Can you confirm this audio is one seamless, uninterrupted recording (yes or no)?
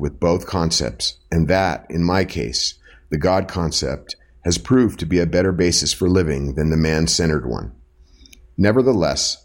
yes